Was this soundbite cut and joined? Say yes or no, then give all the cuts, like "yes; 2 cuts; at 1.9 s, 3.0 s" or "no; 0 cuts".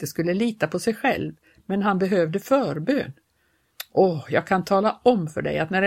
no; 0 cuts